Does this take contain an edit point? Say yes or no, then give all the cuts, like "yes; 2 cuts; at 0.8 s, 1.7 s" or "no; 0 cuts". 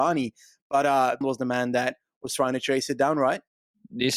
yes; 1 cut; at 1.2 s